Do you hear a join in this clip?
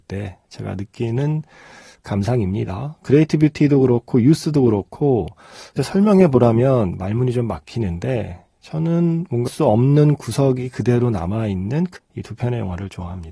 yes; 3 cuts; at 5.8 s, 9.5 s, 12.0 s

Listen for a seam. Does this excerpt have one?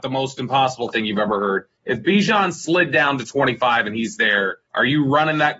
yes; 2 cuts; at 1.7 s, 4.7 s

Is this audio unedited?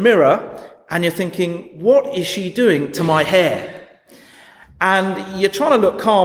yes; 0 cuts

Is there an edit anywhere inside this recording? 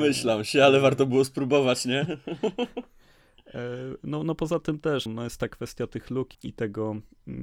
yes; 2 cuts; at 5.1 s, 6.3 s

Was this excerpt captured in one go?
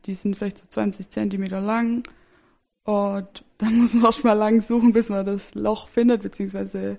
yes; 0 cuts

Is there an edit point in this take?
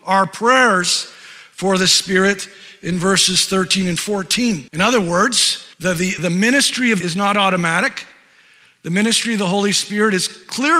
yes; 4 cuts; at 4.7 s, 5.7 s, 6.2 s, 7.0 s

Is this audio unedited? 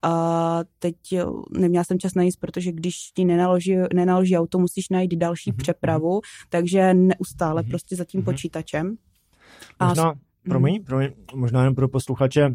yes; 0 cuts

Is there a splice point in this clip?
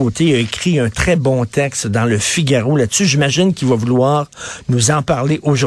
no; 0 cuts

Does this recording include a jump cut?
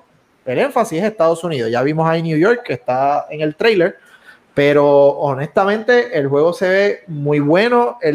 no; 0 cuts

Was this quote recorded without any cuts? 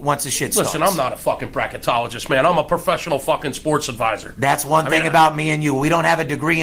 yes; 0 cuts

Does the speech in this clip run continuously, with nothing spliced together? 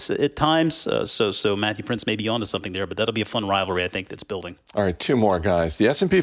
no; 1 cut; at 4.7 s

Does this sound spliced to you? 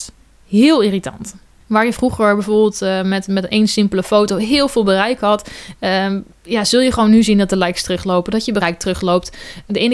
no; 0 cuts

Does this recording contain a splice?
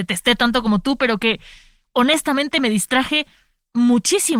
no; 0 cuts

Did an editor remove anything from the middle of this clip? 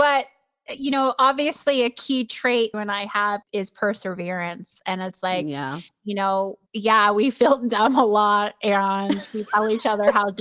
yes; 3 cuts; at 2.7 s, 3.4 s, 6.7 s

